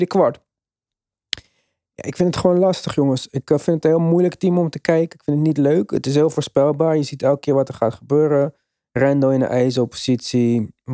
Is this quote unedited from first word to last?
yes; 0 cuts

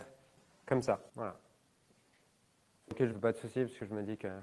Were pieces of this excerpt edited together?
yes; 2 cuts; at 1.1 s, 3.1 s

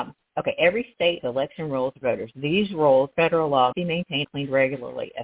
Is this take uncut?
no; 5 cuts; at 1.2 s, 2.0 s, 3.1 s, 3.7 s, 4.2 s

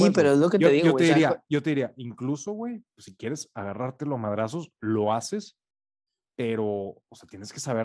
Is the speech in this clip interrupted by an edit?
no; 0 cuts

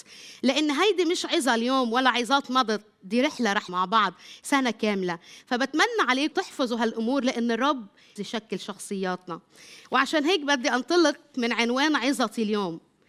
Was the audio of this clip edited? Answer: yes; 3 cuts; at 3.7 s, 6.3 s, 8.2 s

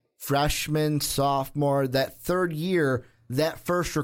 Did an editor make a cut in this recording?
no; 0 cuts

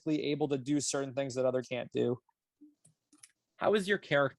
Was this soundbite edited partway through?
yes; 1 cut; at 1.6 s

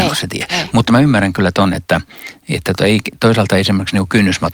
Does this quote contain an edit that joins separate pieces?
no; 0 cuts

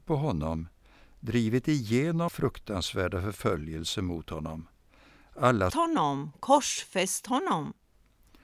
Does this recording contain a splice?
yes; 2 cuts; at 2.3 s, 5.7 s

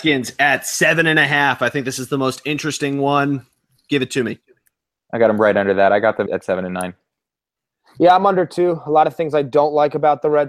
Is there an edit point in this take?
yes; 1 cut; at 6.3 s

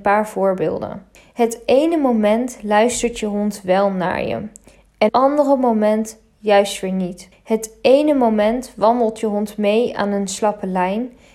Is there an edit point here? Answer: yes; 3 cuts; at 1.2 s, 5.1 s, 7.3 s

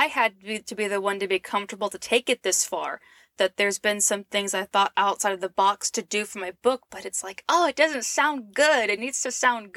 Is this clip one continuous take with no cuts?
yes; 0 cuts

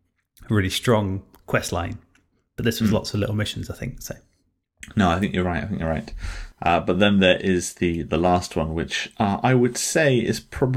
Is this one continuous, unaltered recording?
yes; 0 cuts

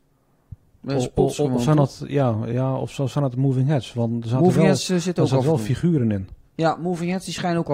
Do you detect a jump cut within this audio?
no; 0 cuts

